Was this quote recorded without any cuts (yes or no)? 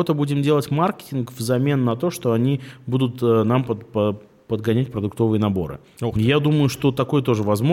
yes